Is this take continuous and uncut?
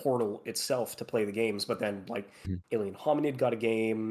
yes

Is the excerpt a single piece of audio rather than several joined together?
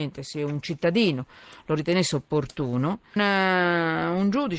no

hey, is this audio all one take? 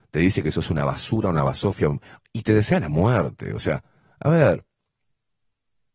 yes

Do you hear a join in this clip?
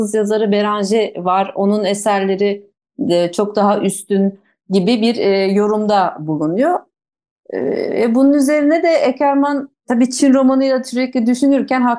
no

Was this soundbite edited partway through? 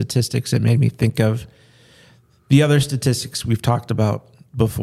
no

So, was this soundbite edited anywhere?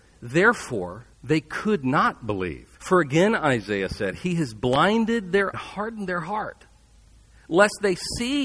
yes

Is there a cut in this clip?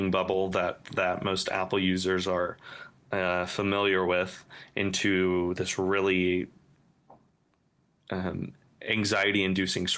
no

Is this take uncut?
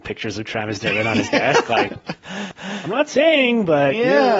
no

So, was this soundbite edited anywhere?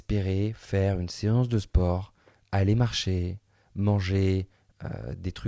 no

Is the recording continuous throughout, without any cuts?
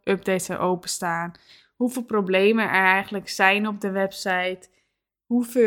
yes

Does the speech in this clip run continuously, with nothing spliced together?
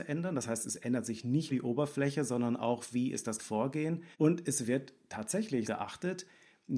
no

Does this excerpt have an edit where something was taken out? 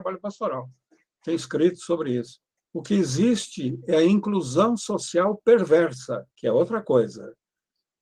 yes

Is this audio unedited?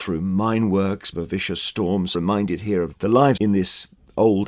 no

